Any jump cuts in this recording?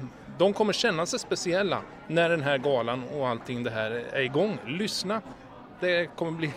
no; 0 cuts

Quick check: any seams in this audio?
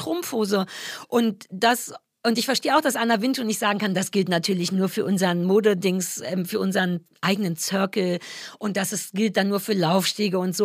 no; 0 cuts

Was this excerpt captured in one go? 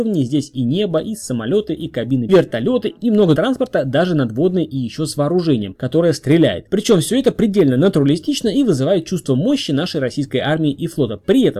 no; 2 cuts; at 2.3 s, 3.3 s

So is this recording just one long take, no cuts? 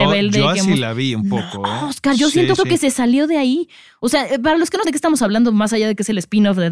no; 2 cuts; at 2.6 s, 4.8 s

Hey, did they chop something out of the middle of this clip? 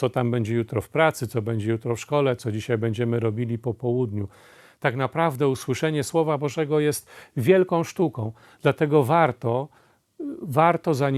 no; 0 cuts

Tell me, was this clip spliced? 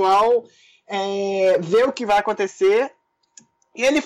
no; 0 cuts

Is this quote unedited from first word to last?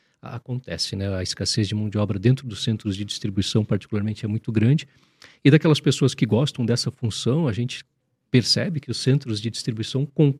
yes; 0 cuts

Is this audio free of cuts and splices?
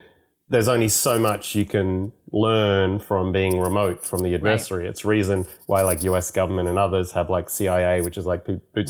yes; 0 cuts

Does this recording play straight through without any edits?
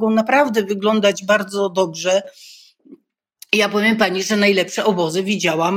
yes; 0 cuts

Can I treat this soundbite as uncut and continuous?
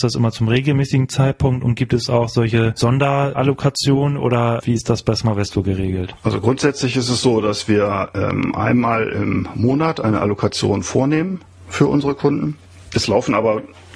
yes; 0 cuts

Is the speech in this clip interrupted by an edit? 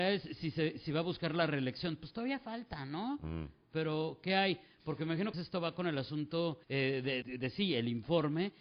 yes; 3 cuts; at 5.3 s, 6.6 s, 7.2 s

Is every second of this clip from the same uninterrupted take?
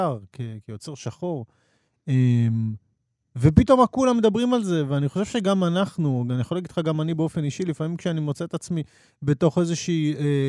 yes; 0 cuts

